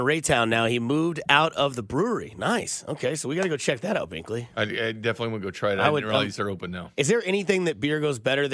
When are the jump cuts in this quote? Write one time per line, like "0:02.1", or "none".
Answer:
none